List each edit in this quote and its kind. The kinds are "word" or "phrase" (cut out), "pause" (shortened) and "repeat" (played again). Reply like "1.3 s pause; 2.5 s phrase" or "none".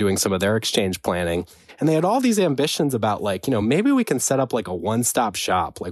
none